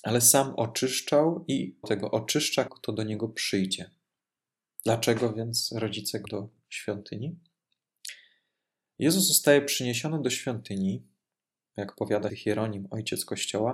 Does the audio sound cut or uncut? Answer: cut